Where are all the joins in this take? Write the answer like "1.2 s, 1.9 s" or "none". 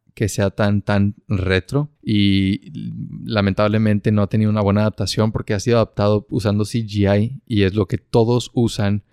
2.0 s